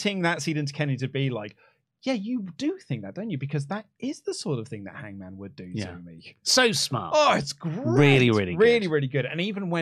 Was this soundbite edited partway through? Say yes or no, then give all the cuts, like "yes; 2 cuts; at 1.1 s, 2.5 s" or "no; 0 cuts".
no; 0 cuts